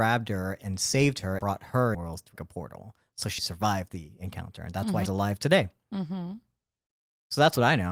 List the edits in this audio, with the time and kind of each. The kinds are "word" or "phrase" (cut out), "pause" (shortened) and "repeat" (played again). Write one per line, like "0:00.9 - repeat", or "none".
0:01.4 - word
0:01.9 - phrase
0:02.4 - word
0:03.4 - word
0:05.1 - word